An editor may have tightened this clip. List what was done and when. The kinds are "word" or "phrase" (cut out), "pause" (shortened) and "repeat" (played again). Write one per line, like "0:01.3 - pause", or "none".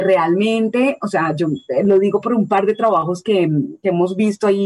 none